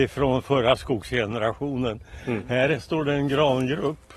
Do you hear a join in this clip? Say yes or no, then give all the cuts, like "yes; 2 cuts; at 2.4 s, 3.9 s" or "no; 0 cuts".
no; 0 cuts